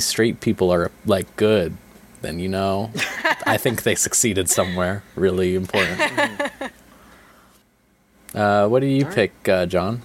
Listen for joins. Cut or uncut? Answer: uncut